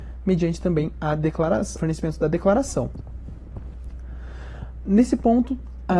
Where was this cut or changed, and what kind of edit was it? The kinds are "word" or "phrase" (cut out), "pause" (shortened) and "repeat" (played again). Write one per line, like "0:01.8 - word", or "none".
0:01.8 - word